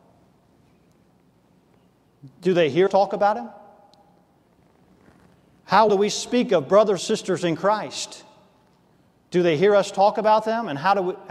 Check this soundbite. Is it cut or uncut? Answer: cut